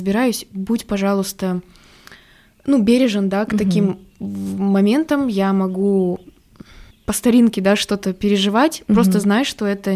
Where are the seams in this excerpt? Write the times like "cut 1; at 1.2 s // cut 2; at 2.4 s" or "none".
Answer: cut 1; at 6.9 s